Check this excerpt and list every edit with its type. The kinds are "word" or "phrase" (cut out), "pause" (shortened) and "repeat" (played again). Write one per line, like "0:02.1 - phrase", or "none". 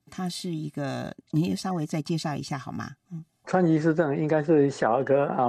0:03.4 - word